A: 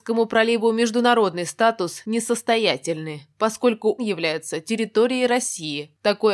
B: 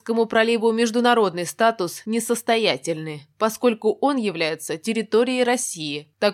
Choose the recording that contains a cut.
A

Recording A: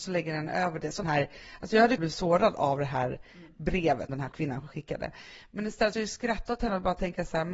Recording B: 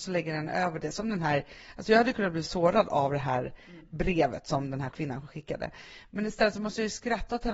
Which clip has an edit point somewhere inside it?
A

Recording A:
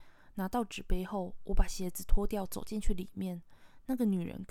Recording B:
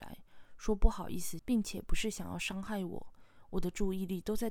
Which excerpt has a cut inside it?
B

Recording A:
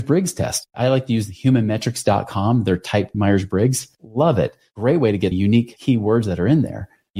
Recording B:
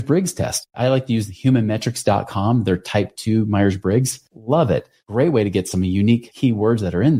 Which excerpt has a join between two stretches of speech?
A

